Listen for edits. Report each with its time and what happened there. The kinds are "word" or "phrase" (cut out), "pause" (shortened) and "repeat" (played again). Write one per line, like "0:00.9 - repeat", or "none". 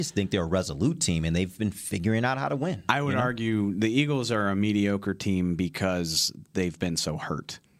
none